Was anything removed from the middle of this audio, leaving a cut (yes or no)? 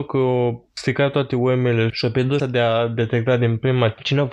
yes